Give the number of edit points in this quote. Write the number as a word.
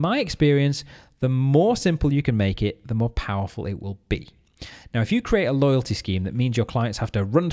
zero